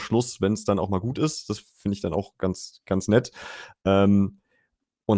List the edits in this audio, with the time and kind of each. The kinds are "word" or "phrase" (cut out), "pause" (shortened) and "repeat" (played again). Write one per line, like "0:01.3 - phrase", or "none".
none